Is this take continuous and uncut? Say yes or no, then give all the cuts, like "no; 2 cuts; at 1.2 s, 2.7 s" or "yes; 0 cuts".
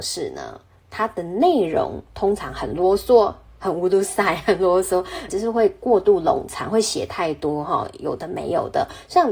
no; 2 cuts; at 3.5 s, 5.3 s